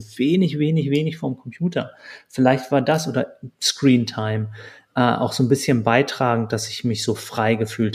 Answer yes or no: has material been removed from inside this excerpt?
no